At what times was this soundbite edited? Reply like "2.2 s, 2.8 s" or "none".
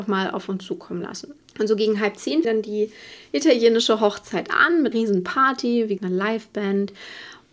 1.4 s, 2.4 s, 4.9 s, 6.0 s